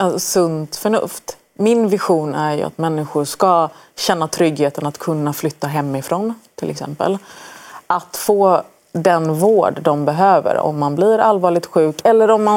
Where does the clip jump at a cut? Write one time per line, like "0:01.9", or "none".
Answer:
none